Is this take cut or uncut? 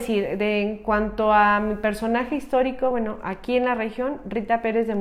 uncut